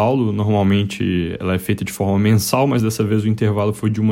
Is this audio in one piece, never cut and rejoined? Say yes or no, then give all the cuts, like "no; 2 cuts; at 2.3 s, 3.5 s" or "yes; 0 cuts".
yes; 0 cuts